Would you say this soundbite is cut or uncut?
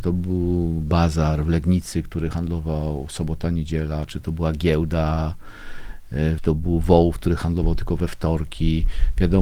cut